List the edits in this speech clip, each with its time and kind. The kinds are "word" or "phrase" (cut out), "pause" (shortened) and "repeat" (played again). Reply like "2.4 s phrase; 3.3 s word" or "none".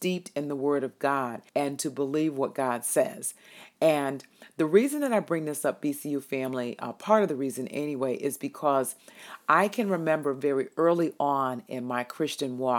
1.5 s pause